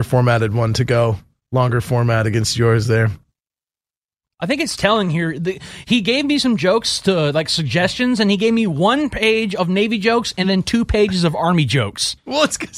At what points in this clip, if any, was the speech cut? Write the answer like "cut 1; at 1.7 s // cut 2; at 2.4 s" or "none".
none